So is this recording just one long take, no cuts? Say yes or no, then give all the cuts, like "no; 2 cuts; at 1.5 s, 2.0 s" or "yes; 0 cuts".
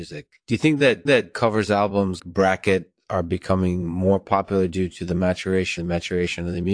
no; 3 cuts; at 1.1 s, 2.2 s, 5.8 s